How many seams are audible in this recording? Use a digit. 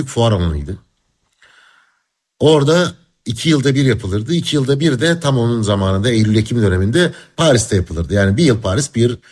0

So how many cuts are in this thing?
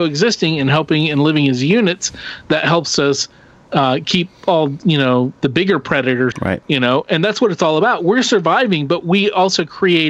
1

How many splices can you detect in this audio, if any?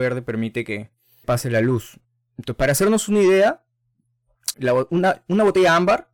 2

